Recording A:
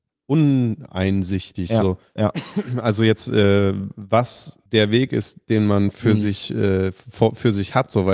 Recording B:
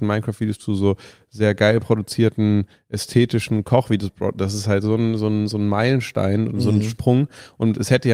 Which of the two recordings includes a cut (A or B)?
A